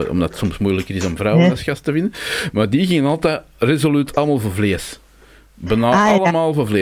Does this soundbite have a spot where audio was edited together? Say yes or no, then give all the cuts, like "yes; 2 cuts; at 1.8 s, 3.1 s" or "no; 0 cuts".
no; 0 cuts